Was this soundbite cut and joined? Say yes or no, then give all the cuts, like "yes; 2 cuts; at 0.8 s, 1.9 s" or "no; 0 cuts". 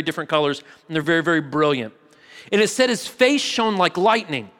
no; 0 cuts